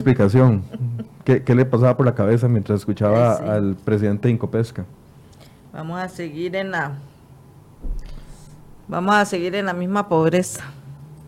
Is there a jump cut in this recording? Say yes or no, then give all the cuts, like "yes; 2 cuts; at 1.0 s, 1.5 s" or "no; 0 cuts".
no; 0 cuts